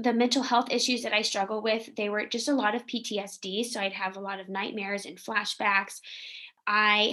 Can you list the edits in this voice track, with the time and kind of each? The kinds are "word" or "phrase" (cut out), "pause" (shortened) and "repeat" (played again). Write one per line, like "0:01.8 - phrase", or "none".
none